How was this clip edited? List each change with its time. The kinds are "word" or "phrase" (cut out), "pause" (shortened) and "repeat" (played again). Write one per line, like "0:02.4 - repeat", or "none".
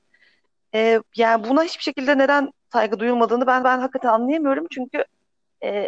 0:01.1 - pause
0:02.6 - pause
0:03.6 - repeat